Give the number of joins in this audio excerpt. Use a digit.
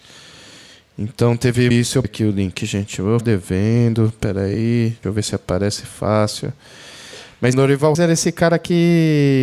6